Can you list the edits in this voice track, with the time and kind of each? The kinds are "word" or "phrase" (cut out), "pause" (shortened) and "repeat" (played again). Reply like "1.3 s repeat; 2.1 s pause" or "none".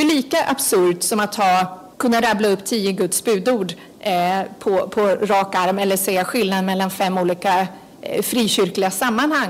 1.9 s pause